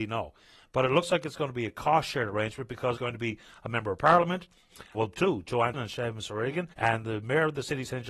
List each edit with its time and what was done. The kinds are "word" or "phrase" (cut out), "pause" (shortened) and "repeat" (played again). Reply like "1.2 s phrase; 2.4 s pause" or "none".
3.0 s word; 4.9 s word; 5.7 s word; 6.7 s pause